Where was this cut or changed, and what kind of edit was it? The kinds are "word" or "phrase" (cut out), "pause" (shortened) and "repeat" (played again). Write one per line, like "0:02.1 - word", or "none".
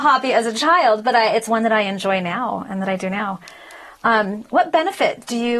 none